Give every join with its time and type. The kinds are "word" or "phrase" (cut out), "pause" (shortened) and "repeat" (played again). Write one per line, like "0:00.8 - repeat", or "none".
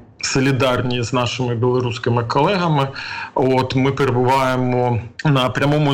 none